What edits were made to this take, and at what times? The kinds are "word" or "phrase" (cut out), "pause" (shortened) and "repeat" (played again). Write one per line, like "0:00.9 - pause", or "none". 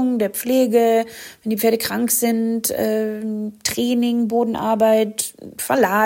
none

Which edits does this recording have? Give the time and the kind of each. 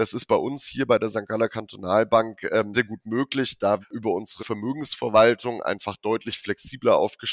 0:02.7 - word
0:03.8 - word
0:04.4 - word

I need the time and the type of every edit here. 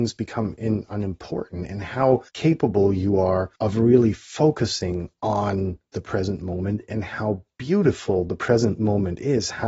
0:02.3 - pause
0:03.6 - pause

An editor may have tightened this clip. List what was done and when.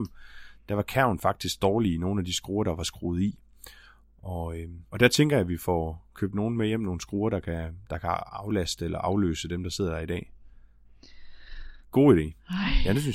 0:04.9 - pause
0:11.8 - pause

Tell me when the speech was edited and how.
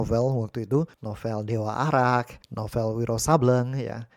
0:00.9 - pause
0:02.4 - pause

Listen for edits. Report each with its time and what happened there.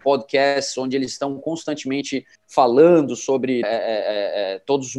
0:02.3 - pause
0:03.6 - word

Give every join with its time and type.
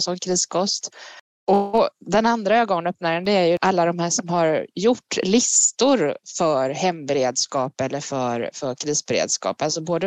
none

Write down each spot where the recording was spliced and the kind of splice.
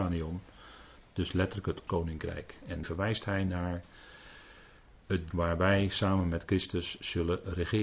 0:01.9 - phrase
0:02.8 - word
0:05.3 - phrase

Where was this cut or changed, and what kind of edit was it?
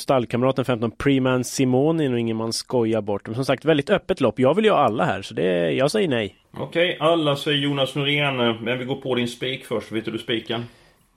0:06.4 - pause

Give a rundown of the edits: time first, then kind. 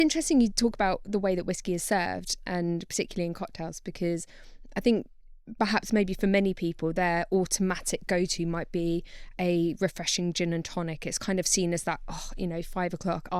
none

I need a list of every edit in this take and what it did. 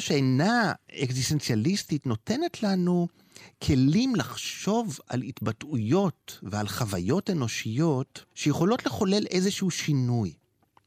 0:08.3 - pause

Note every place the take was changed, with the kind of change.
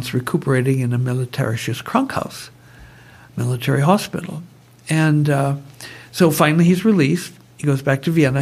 none

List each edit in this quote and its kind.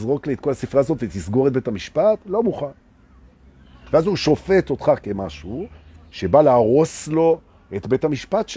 none

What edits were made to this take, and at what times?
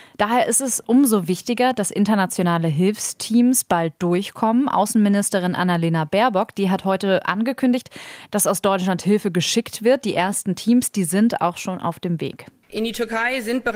none

